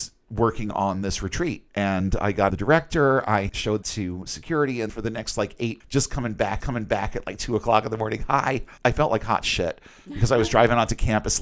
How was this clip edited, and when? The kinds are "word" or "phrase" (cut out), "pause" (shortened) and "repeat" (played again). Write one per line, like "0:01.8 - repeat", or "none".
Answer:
0:01.7 - pause
0:02.5 - phrase
0:03.8 - word
0:04.9 - word
0:05.8 - word
0:06.6 - repeat
0:08.8 - pause